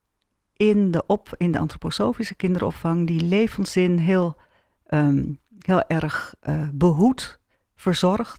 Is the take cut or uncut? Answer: uncut